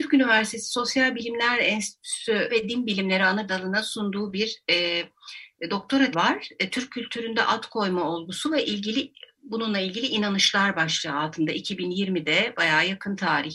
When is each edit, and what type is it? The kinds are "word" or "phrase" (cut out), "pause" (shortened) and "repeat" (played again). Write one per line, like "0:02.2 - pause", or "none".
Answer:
0:02.5 - word
0:03.5 - word
0:06.1 - word